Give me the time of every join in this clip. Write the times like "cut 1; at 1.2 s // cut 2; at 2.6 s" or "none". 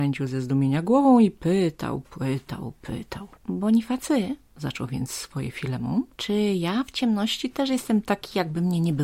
cut 1; at 3.4 s // cut 2; at 6.1 s